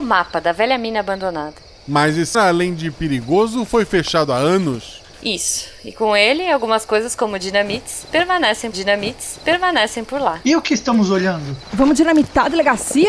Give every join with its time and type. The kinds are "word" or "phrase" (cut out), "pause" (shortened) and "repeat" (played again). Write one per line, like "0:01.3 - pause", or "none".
0:02.3 - word
0:08.7 - repeat